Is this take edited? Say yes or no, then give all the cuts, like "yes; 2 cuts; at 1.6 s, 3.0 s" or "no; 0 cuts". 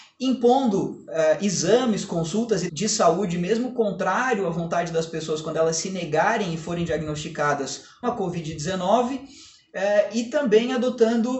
yes; 2 cuts; at 2.7 s, 8.0 s